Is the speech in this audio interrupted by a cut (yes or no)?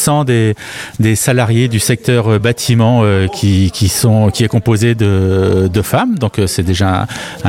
no